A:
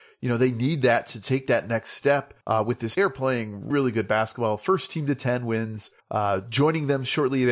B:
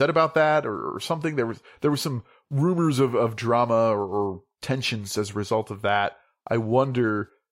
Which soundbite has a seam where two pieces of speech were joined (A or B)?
A